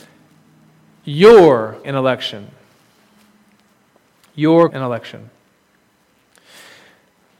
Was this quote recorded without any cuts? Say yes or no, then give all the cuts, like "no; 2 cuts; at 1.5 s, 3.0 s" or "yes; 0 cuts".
no; 2 cuts; at 1.8 s, 4.7 s